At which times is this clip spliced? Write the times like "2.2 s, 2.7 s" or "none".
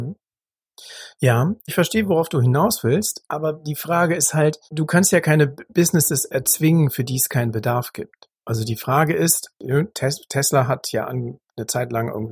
1.7 s, 4.6 s, 8.3 s